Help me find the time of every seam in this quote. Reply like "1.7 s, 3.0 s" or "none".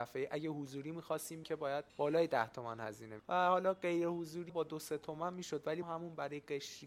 1.4 s, 1.9 s, 3.2 s, 4.5 s, 5.8 s